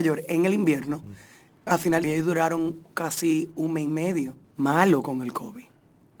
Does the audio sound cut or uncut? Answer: cut